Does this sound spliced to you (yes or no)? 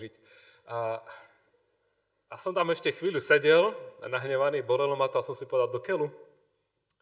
no